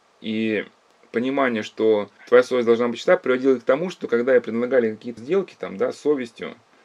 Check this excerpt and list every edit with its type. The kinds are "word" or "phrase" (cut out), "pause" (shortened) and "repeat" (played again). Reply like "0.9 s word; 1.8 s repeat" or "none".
2.2 s pause; 5.2 s word